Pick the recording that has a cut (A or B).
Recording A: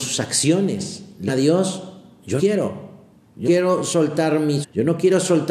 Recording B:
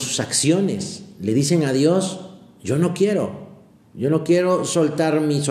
A